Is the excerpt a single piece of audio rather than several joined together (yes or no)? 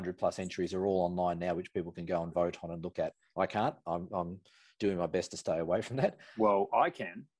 yes